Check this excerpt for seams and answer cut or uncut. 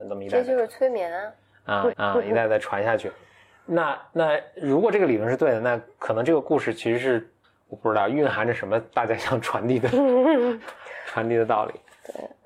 cut